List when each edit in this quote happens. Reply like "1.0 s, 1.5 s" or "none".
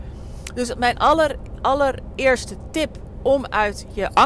none